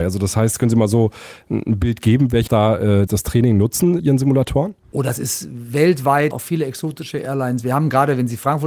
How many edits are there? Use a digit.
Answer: 4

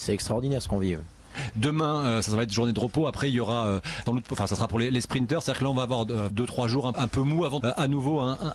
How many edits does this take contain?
4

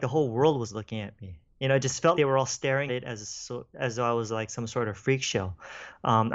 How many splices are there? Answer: 2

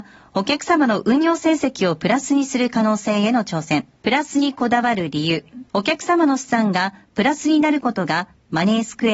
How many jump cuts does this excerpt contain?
2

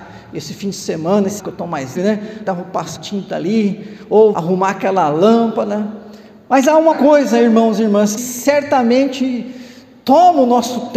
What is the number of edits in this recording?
7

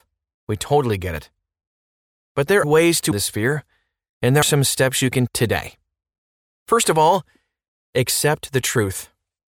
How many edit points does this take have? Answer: 4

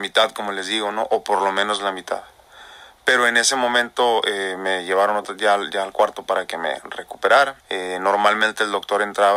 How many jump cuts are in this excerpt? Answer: 1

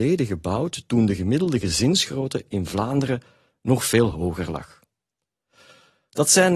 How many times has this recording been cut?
0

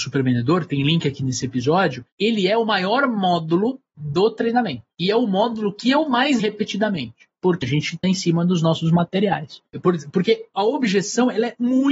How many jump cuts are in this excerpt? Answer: 3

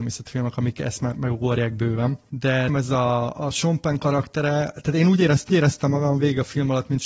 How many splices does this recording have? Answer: 3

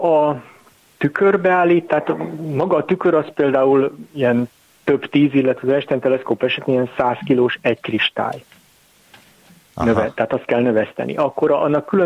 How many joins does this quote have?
0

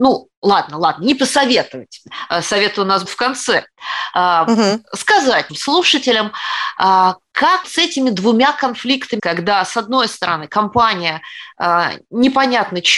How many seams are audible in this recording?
4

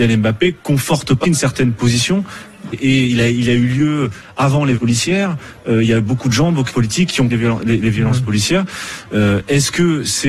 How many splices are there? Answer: 5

